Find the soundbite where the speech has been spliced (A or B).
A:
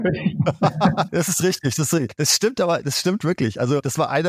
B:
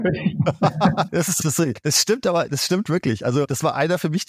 B